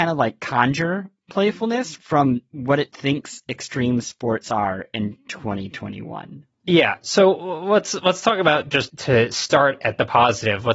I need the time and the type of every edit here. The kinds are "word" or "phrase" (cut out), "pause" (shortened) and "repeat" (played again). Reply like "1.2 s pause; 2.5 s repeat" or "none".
8.9 s word